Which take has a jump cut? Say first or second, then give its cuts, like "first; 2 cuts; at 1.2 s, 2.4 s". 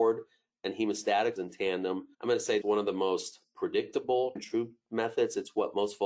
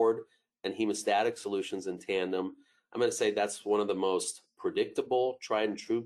first; 4 cuts; at 1.4 s, 2.1 s, 2.6 s, 4.4 s